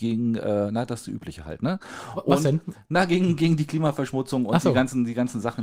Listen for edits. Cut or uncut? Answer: uncut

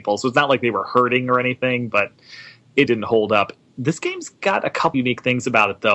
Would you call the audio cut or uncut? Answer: cut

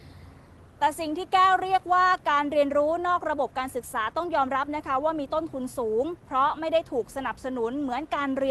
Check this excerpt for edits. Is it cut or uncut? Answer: cut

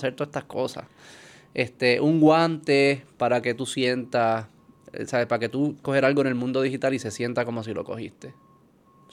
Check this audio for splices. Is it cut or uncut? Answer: cut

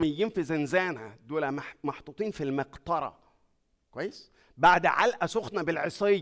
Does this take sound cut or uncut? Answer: uncut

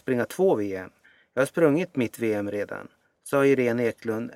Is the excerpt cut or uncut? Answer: uncut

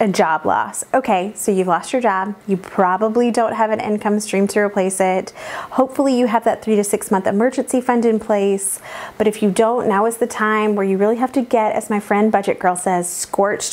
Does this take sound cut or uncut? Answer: cut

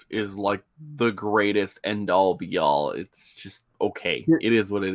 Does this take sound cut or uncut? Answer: uncut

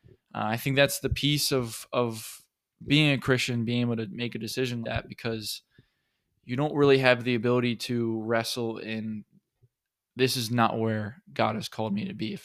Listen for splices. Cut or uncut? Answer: cut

